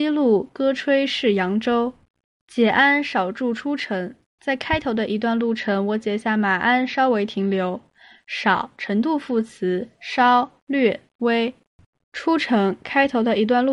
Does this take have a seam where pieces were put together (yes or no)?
yes